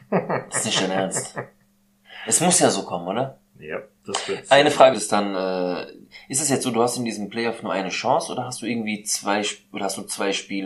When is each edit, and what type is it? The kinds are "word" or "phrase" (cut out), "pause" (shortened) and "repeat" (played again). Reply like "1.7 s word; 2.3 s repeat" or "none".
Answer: 4.0 s pause; 4.9 s phrase